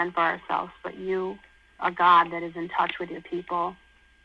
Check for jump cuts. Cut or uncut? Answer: cut